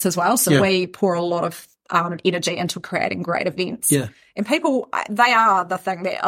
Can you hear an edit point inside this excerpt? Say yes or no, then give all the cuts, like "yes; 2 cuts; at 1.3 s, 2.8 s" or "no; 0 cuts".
no; 0 cuts